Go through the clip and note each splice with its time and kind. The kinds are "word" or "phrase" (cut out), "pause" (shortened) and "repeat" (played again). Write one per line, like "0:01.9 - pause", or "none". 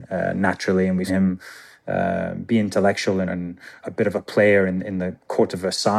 0:01.1 - word
0:03.3 - word